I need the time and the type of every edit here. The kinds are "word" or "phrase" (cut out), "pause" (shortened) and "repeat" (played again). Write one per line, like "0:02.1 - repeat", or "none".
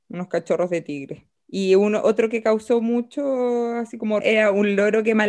0:04.2 - word